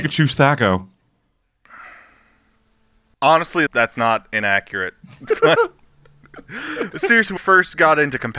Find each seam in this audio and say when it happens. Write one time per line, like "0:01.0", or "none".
0:03.7
0:06.9
0:07.4